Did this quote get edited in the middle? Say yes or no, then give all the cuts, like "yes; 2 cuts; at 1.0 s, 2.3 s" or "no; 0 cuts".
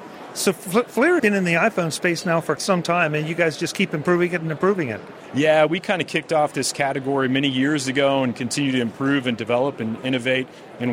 yes; 2 cuts; at 1.2 s, 2.6 s